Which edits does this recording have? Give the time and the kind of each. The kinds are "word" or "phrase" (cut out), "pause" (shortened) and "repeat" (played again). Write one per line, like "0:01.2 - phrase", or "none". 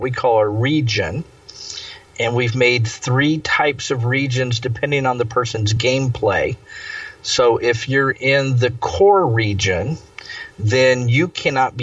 none